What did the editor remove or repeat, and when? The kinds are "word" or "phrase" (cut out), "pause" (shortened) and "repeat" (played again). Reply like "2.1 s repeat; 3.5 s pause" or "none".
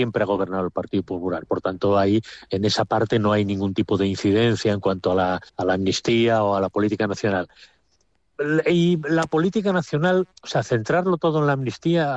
5.5 s pause